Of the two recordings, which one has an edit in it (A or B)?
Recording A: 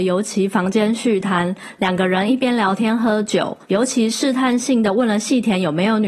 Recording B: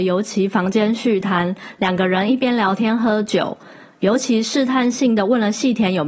A